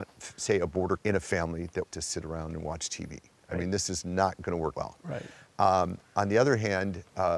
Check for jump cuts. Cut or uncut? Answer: cut